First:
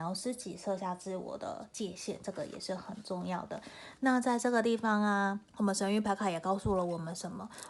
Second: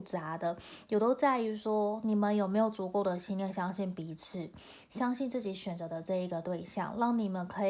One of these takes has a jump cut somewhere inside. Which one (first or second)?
first